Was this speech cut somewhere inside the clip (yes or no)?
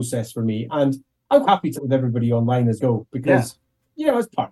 yes